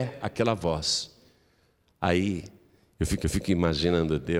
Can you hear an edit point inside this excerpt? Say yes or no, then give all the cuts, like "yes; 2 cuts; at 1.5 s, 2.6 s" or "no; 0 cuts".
yes; 1 cut; at 3.2 s